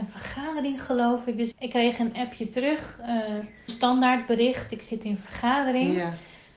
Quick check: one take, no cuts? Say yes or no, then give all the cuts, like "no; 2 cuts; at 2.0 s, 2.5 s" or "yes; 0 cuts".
no; 2 cuts; at 1.5 s, 3.7 s